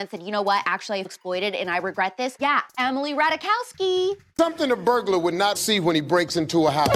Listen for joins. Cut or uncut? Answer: cut